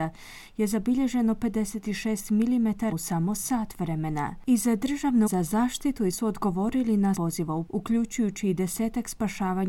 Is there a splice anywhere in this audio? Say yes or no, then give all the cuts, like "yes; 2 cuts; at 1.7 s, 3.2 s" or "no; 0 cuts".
yes; 5 cuts; at 2.9 s, 5.3 s, 6.1 s, 7.1 s, 7.7 s